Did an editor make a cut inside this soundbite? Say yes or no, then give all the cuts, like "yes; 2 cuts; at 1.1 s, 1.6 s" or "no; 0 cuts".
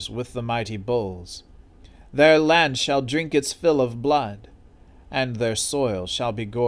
no; 0 cuts